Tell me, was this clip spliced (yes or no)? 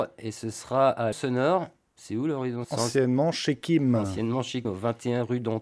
yes